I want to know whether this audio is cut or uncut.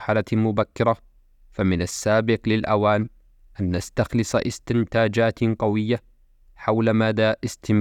uncut